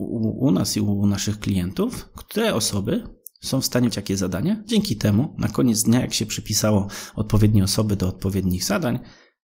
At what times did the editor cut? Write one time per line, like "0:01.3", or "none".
0:03.9